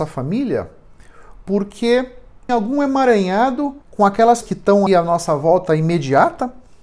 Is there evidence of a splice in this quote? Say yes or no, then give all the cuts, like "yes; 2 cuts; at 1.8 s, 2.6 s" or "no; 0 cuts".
yes; 4 cuts; at 2.5 s, 3.8 s, 4.4 s, 4.9 s